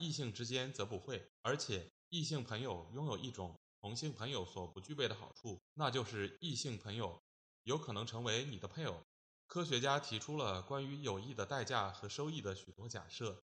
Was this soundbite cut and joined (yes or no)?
yes